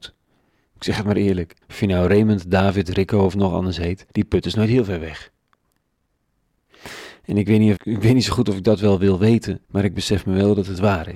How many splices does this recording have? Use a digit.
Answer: 4